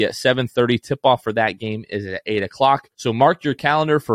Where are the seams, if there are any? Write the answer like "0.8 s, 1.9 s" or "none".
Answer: 2.9 s